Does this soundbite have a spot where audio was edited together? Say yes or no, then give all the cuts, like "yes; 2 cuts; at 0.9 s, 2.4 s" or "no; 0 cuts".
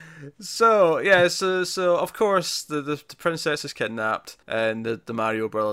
yes; 1 cut; at 4.4 s